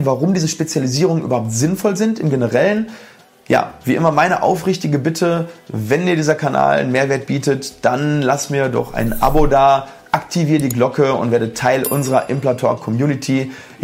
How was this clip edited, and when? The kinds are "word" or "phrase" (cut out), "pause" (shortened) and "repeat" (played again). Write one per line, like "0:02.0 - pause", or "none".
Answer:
none